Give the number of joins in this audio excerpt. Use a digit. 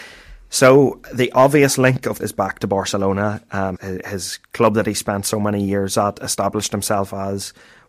2